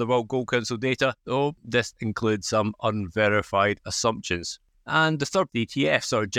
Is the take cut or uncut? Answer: cut